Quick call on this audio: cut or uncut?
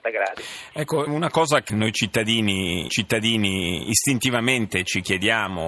cut